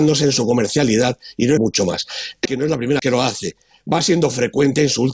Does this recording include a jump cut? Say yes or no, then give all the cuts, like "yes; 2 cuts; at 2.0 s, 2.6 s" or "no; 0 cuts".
yes; 3 cuts; at 1.6 s, 2.4 s, 3.0 s